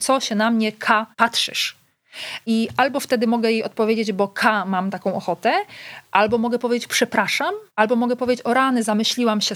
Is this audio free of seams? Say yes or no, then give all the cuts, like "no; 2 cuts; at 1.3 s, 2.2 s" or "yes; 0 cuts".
no; 2 cuts; at 1.1 s, 7.7 s